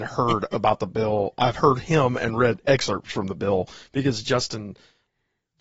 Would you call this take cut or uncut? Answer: uncut